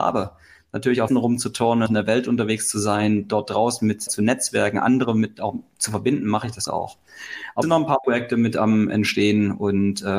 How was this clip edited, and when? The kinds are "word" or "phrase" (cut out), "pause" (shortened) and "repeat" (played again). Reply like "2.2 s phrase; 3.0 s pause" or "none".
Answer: 1.1 s word; 1.9 s word; 4.1 s word; 6.7 s word; 7.6 s word; 8.0 s word